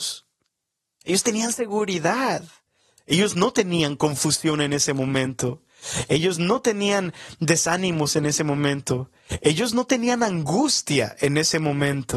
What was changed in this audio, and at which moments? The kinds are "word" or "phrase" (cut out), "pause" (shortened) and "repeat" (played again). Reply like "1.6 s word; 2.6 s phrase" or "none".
none